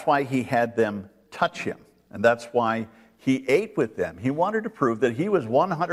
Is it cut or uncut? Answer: uncut